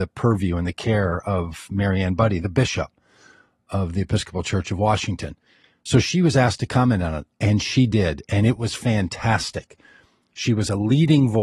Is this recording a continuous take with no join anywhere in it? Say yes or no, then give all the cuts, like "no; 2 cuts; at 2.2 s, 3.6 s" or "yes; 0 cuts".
yes; 0 cuts